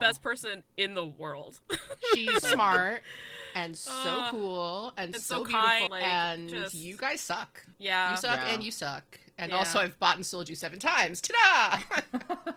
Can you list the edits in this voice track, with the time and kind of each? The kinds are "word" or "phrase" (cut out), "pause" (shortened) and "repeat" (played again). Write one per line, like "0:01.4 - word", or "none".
0:02.4 - word
0:05.9 - phrase
0:07.7 - pause